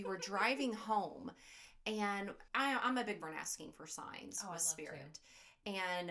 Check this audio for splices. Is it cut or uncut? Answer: cut